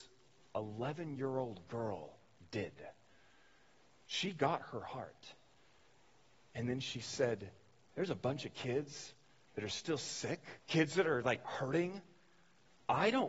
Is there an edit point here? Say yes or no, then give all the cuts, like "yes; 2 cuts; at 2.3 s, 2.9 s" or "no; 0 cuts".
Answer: yes; 1 cut; at 10.6 s